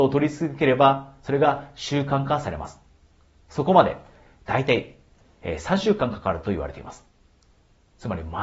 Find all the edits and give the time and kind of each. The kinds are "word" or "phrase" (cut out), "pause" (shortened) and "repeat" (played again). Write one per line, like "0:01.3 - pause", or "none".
none